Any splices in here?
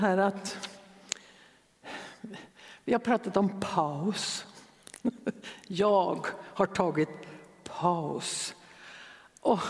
no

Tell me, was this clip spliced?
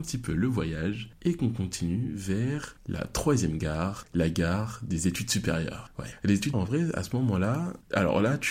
yes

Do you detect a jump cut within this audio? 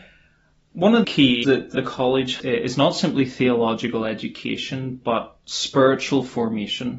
yes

